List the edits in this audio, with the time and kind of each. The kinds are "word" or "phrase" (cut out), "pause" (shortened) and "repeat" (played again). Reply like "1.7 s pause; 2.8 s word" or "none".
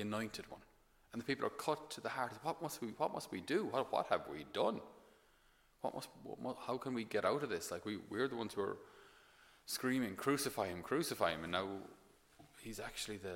none